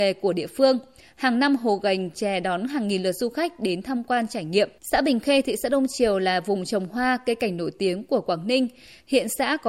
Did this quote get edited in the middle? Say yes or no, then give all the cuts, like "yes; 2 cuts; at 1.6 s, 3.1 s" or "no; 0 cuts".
yes; 1 cut; at 4.8 s